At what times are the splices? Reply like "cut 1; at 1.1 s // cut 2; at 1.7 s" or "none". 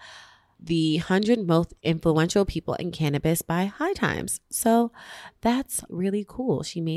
cut 1; at 1.8 s // cut 2; at 5.9 s